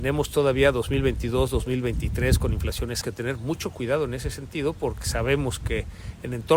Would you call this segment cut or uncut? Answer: cut